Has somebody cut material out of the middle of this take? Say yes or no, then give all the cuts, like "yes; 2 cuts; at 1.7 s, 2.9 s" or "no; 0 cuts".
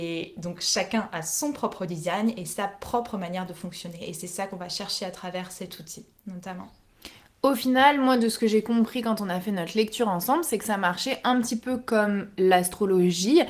no; 0 cuts